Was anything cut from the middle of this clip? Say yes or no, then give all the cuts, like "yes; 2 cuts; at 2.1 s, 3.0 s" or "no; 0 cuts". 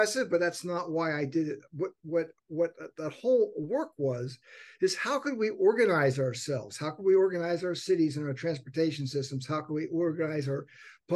yes; 1 cut; at 2.4 s